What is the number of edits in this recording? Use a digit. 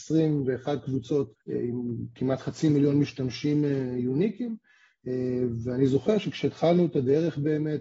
1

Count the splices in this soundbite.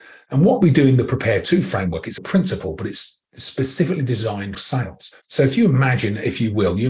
2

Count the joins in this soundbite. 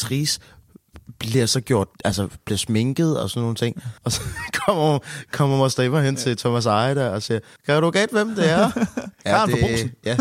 4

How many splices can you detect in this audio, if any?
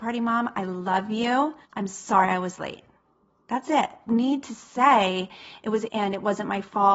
3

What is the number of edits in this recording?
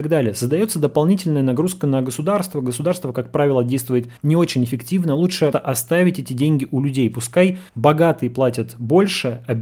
3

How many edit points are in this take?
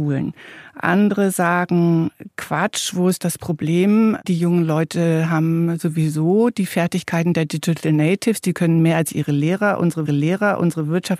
1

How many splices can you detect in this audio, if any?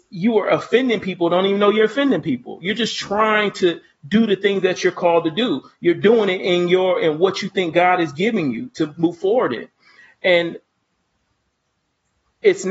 0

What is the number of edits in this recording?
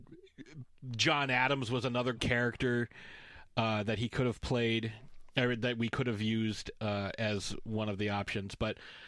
1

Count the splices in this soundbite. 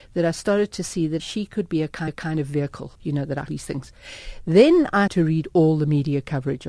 5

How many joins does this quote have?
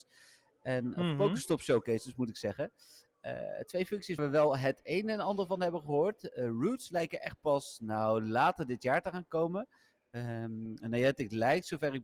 1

